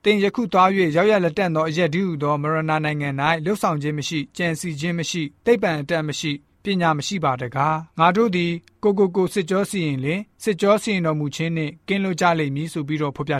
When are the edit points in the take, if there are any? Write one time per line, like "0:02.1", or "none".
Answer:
0:07.9